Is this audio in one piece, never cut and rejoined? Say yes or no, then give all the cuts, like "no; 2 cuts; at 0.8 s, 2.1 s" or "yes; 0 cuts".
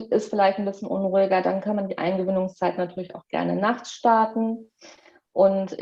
yes; 0 cuts